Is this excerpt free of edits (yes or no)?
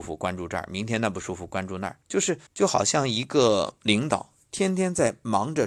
no